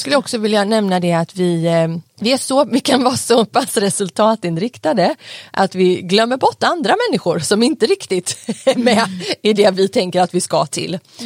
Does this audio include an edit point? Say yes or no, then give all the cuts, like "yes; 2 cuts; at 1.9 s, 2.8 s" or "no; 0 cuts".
yes; 1 cut; at 2.1 s